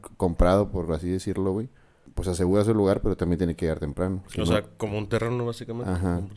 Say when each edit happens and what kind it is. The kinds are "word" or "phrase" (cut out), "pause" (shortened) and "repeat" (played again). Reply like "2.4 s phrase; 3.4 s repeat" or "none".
none